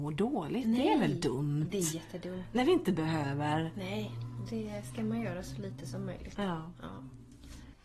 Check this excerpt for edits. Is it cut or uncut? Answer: uncut